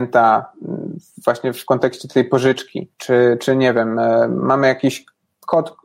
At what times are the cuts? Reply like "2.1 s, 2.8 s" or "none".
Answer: 2.9 s